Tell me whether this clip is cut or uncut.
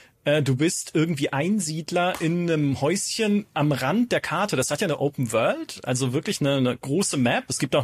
uncut